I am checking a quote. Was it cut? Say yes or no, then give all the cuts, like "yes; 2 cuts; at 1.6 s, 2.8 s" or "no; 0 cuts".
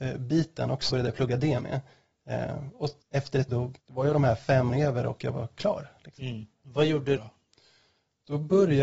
yes; 7 cuts; at 0.9 s, 3.0 s, 3.5 s, 3.8 s, 4.7 s, 6.5 s, 7.2 s